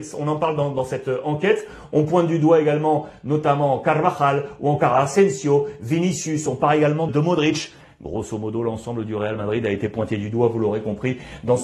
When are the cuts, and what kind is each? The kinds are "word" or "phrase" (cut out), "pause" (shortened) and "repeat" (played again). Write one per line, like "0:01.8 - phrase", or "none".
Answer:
0:07.1 - word